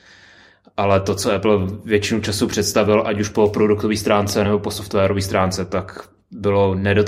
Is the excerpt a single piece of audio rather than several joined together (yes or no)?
yes